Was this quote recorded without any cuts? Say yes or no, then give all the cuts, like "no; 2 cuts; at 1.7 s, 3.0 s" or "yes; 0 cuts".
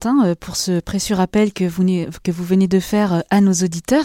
yes; 0 cuts